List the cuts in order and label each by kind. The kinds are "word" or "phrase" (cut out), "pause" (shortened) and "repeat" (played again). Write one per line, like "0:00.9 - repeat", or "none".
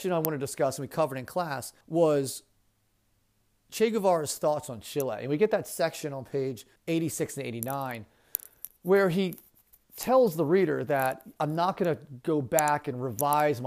0:01.8 - pause
0:06.8 - pause
0:08.8 - pause